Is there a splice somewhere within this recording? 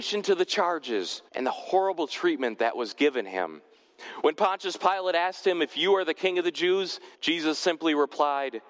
yes; 2 cuts; at 1.3 s, 7.1 s

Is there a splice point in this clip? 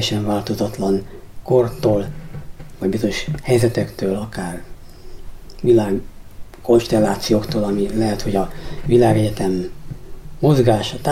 yes; 1 cut; at 6.5 s

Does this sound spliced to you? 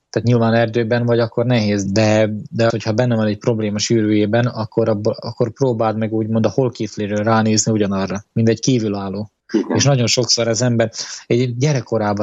yes; 3 cuts; at 1.9 s, 2.7 s, 9.4 s

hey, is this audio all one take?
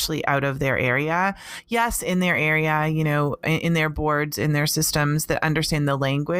yes; 0 cuts

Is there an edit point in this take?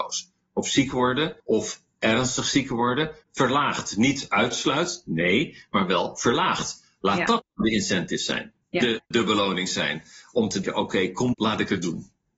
yes; 6 cuts; at 1.4 s, 3.2 s, 8.6 s, 9.1 s, 10.6 s, 11.3 s

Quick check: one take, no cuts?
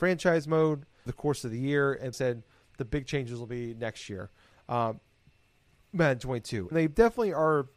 no; 4 cuts; at 1.1 s, 2.1 s, 2.8 s, 6.7 s

